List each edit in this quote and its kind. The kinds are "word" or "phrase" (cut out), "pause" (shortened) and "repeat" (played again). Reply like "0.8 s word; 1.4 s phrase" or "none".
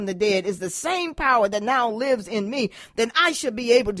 none